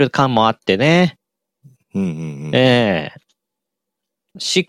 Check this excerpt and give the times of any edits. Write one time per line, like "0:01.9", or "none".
none